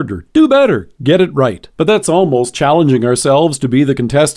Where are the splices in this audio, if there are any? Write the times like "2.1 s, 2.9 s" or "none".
1.7 s, 2.5 s